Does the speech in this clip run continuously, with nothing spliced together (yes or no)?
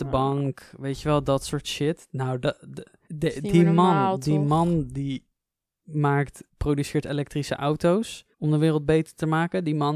no